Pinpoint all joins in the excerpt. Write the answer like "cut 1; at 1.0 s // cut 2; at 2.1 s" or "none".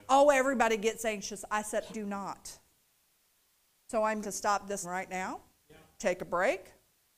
cut 1; at 1.9 s // cut 2; at 4.2 s // cut 3; at 4.8 s